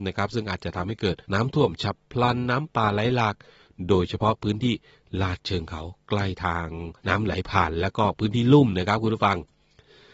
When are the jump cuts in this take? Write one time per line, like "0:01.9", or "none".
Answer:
0:01.2
0:07.0